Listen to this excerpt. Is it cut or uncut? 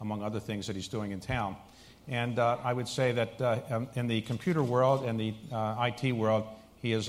uncut